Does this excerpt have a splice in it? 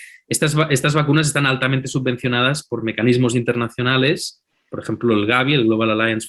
no; 0 cuts

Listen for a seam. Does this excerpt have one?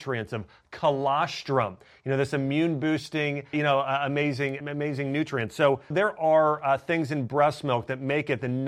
yes; 3 cuts; at 3.5 s, 4.6 s, 5.9 s

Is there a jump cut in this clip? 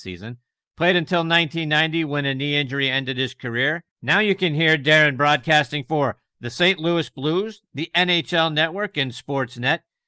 yes; 1 cut; at 3.9 s

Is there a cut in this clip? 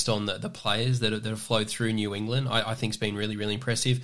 no; 0 cuts

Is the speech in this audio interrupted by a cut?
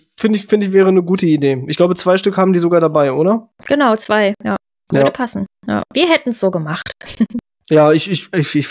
no; 0 cuts

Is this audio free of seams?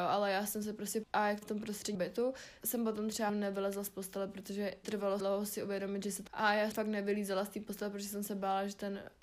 no; 9 cuts; at 1.0 s, 1.4 s, 1.9 s, 2.6 s, 3.3 s, 4.8 s, 5.2 s, 6.3 s, 6.7 s

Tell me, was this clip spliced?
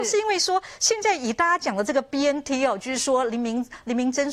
no; 0 cuts

